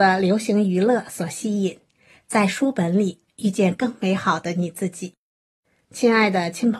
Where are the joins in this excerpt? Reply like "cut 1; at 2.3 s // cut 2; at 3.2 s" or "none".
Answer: none